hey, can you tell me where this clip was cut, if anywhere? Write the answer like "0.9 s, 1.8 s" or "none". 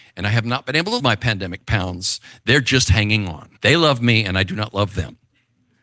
1.0 s, 3.6 s

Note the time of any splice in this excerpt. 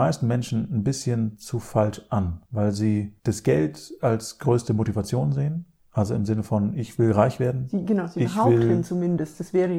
2.5 s, 3.2 s, 5.8 s

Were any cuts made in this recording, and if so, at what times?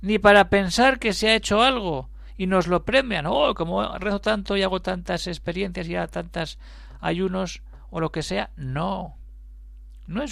none

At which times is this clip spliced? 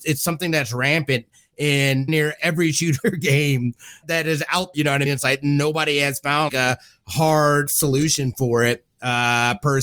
2.1 s, 2.4 s, 4.0 s, 4.7 s, 5.1 s, 6.5 s, 7.7 s

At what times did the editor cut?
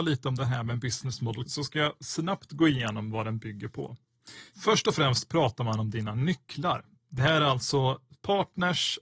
1.5 s

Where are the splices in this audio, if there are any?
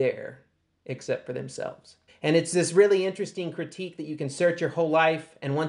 2.1 s

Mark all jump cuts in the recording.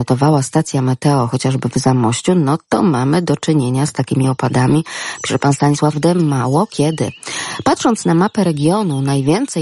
5.9 s

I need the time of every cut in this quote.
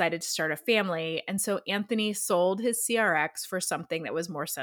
none

